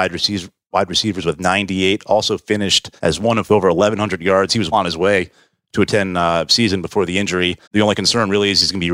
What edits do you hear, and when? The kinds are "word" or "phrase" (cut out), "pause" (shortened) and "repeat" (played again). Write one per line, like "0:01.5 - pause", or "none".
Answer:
0:03.0 - pause
0:03.5 - phrase
0:04.7 - word
0:05.9 - word
0:07.6 - pause